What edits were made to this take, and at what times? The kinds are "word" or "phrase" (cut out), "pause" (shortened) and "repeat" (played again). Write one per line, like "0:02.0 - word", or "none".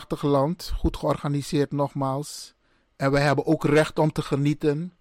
none